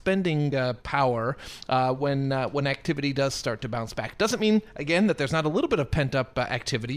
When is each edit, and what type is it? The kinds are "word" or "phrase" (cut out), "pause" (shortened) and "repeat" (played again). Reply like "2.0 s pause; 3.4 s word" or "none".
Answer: none